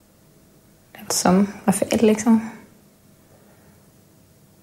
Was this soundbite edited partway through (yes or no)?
yes